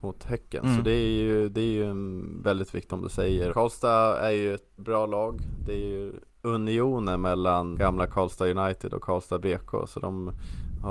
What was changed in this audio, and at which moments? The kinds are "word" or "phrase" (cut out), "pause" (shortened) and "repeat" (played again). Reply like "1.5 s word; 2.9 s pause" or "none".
2.9 s word; 3.5 s word; 4.8 s word; 7.7 s word